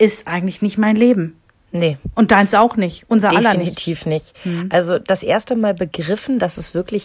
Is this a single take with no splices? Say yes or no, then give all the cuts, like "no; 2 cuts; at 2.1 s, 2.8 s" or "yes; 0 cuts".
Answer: yes; 0 cuts